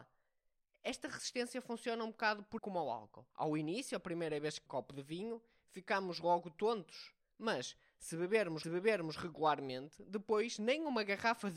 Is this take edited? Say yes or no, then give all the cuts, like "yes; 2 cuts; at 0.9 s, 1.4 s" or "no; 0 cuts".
yes; 4 cuts; at 2.6 s, 3.3 s, 4.7 s, 8.6 s